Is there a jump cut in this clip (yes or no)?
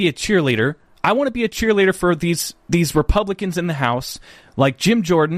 no